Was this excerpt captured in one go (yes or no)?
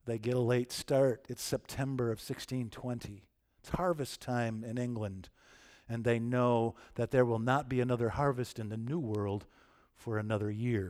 yes